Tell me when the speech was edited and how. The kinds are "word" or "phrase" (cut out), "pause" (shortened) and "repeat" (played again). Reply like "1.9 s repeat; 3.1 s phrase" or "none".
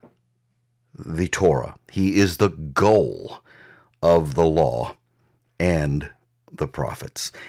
none

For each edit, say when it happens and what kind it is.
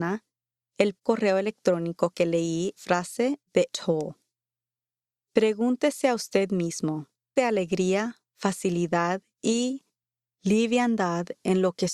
1.0 s word; 2.8 s phrase; 3.7 s word; 7.4 s word; 9.3 s pause

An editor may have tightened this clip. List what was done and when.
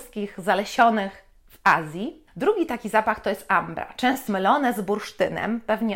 2.3 s pause; 4.3 s phrase

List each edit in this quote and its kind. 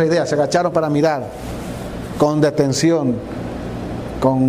none

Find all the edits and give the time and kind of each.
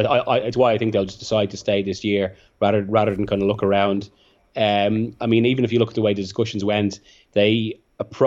none

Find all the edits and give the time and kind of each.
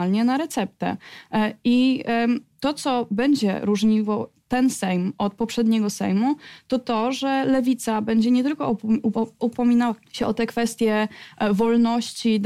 10.0 s pause

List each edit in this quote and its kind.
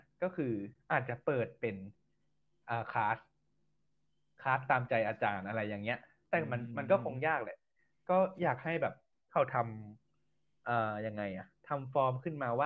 none

